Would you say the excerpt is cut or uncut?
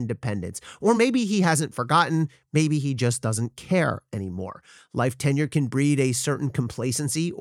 uncut